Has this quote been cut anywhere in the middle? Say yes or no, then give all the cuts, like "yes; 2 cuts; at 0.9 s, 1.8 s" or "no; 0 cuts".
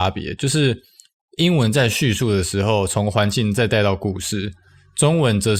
no; 0 cuts